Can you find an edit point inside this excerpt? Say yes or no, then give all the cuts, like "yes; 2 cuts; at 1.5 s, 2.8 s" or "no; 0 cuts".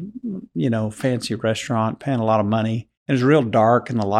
yes; 1 cut; at 3.0 s